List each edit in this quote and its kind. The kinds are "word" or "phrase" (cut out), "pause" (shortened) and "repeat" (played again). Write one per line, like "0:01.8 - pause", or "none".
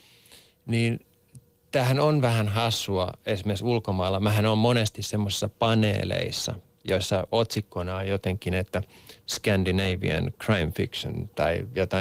none